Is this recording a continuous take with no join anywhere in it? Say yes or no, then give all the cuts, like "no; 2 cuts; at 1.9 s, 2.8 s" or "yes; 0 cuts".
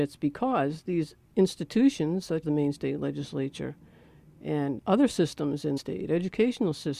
no; 3 cuts; at 2.4 s, 4.8 s, 5.8 s